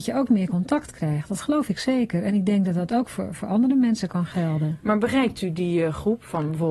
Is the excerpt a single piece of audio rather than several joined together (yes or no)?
yes